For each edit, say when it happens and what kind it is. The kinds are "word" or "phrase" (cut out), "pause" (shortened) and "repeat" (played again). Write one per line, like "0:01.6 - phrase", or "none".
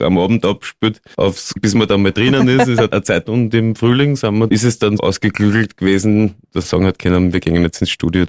0:02.9 - word
0:03.3 - word
0:04.5 - word
0:05.0 - word
0:06.6 - word